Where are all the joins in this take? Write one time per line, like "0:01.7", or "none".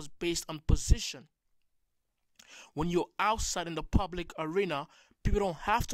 none